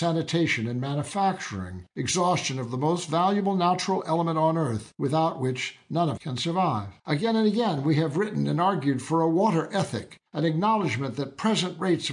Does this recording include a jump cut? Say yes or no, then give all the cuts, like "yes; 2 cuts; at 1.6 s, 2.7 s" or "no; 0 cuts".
yes; 5 cuts; at 1.9 s, 4.9 s, 6.2 s, 7.0 s, 10.3 s